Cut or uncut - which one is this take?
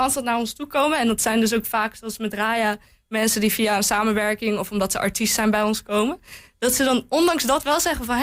uncut